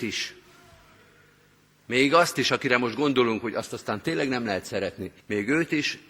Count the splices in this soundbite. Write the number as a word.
one